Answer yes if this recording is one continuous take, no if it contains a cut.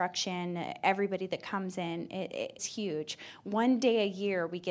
no